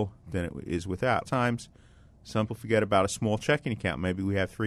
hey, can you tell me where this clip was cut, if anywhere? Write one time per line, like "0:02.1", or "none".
0:01.2
0:02.5